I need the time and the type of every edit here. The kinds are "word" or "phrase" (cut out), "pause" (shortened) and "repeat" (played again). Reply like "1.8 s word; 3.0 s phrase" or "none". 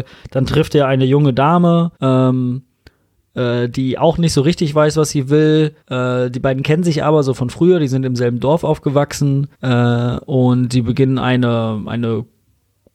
2.0 s pause; 5.8 s pause; 9.5 s pause